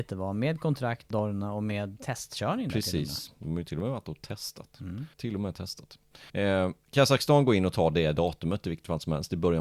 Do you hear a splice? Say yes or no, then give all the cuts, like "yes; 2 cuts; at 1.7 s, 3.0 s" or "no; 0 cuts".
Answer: yes; 4 cuts; at 1.1 s, 2.0 s, 5.1 s, 6.3 s